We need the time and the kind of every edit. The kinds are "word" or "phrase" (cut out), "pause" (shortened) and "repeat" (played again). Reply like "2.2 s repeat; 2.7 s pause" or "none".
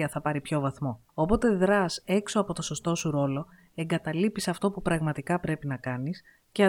1.1 s pause